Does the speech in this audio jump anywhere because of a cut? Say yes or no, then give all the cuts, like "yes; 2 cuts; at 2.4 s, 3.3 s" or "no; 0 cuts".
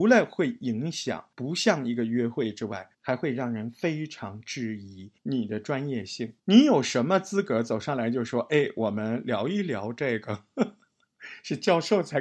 yes; 4 cuts; at 1.3 s, 2.9 s, 5.2 s, 6.4 s